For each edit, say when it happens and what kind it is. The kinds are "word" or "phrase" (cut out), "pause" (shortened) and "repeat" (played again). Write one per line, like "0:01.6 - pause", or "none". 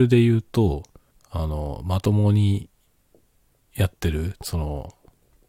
0:01.1 - pause